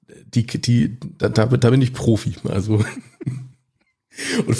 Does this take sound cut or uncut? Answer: uncut